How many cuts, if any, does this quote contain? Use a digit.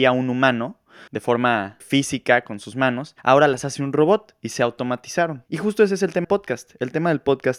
5